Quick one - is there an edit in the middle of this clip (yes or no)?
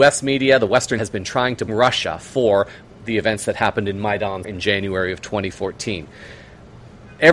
yes